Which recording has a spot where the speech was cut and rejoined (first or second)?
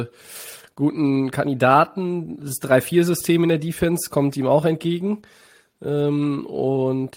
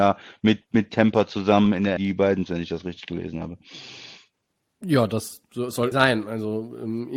second